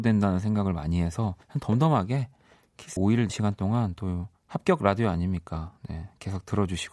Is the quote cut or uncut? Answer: cut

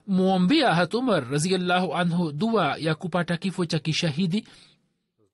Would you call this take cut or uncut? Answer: uncut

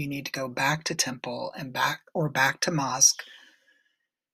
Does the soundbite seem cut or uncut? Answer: uncut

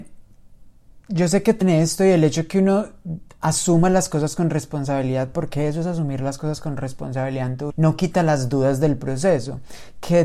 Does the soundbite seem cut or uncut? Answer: cut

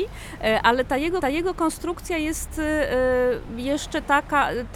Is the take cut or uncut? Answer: cut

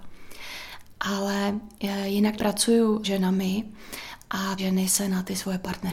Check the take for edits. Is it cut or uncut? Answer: cut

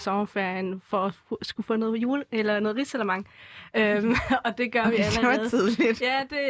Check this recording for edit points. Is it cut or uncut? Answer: uncut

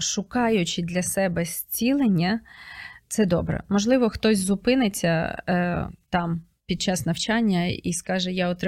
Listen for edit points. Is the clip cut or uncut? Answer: uncut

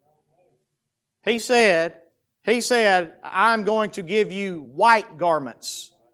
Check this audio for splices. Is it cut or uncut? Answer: uncut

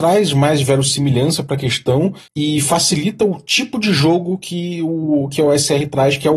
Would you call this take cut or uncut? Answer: cut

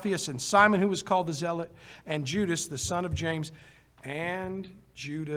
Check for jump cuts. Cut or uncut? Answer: uncut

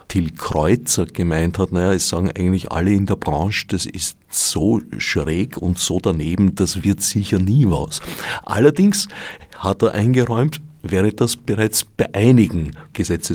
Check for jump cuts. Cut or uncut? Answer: uncut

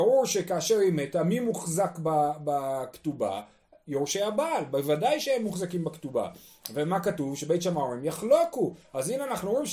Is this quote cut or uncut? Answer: uncut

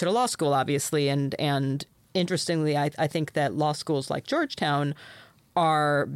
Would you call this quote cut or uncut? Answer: uncut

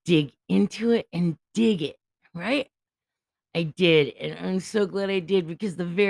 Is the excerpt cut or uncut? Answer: uncut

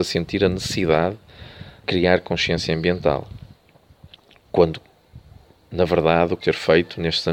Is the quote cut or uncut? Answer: cut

